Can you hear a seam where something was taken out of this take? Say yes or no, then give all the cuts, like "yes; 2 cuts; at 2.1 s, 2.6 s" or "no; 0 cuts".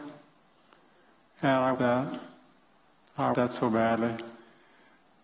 yes; 2 cuts; at 1.7 s, 3.3 s